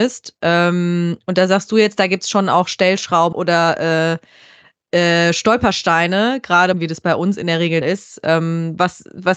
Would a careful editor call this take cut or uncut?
cut